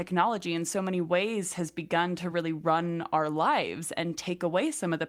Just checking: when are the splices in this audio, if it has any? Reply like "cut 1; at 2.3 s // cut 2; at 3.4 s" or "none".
none